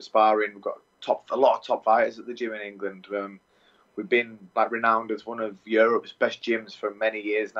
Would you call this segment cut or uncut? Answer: uncut